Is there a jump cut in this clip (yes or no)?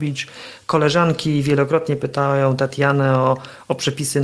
no